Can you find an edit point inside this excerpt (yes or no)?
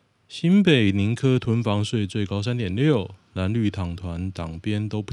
no